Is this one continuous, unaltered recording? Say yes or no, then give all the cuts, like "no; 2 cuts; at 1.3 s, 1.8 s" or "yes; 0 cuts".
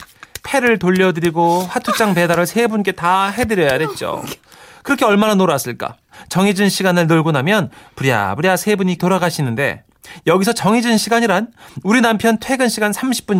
no; 1 cut; at 9.0 s